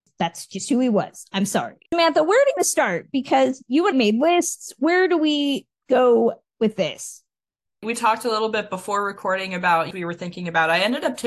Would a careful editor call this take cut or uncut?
cut